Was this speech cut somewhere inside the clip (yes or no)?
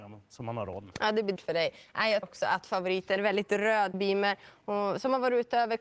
yes